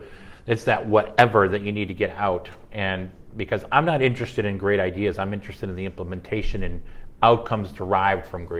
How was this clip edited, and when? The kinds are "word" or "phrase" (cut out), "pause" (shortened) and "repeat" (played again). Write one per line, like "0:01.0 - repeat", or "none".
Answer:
none